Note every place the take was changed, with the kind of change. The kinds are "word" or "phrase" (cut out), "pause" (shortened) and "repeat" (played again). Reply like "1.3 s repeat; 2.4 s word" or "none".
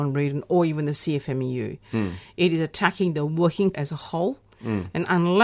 3.7 s word